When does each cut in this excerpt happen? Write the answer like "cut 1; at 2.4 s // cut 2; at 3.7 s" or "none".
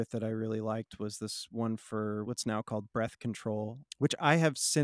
none